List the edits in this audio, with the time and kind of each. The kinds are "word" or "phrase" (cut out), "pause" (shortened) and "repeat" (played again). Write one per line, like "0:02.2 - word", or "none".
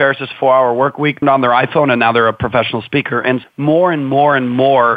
0:01.2 - word
0:03.4 - word